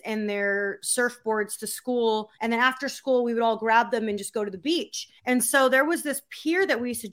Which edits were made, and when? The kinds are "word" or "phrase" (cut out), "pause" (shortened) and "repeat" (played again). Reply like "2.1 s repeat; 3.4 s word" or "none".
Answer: 2.3 s pause; 5.2 s pause

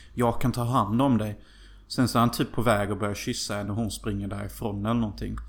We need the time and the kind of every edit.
none

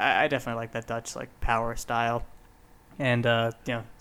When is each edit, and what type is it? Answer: none

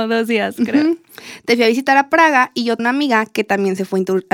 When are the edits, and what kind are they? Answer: 2.8 s word

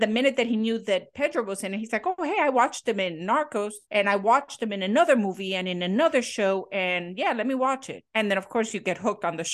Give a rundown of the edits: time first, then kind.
3.8 s pause; 8.1 s pause

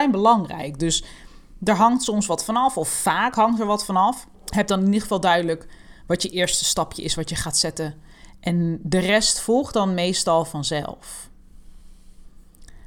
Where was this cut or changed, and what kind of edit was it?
4.3 s pause

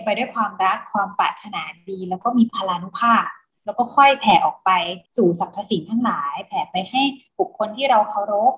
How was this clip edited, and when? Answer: 5.1 s pause

